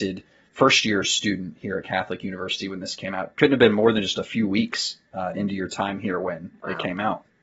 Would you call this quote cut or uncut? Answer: uncut